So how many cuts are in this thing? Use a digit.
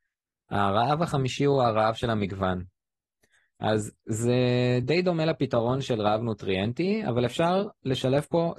0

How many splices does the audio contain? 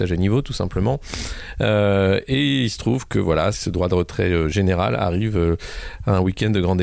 1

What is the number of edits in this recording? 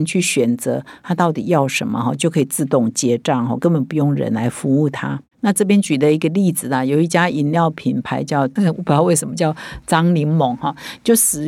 1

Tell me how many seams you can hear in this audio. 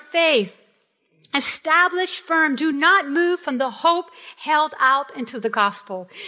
0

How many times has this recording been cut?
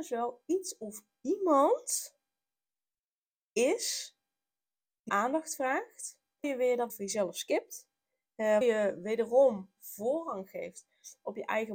5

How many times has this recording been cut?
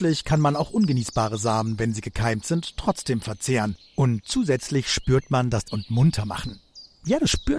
1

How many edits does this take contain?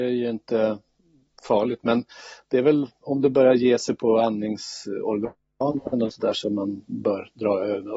0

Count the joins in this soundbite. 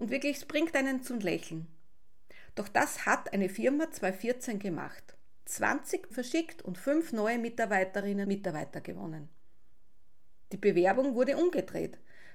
2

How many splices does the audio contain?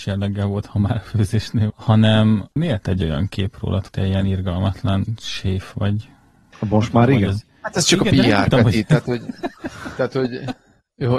3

